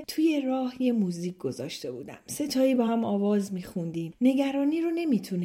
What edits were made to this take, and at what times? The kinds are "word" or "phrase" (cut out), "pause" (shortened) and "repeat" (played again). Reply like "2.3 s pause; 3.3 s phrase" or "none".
none